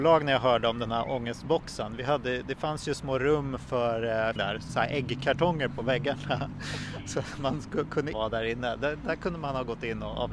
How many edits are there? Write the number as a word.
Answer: three